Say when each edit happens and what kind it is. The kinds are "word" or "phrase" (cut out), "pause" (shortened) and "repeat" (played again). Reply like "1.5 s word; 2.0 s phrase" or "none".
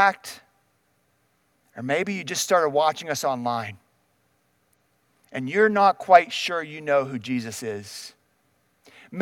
none